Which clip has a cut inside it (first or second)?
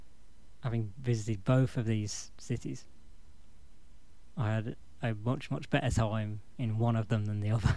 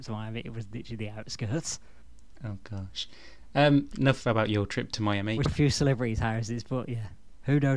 second